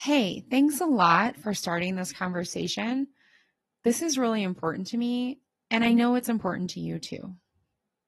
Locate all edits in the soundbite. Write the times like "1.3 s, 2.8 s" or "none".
none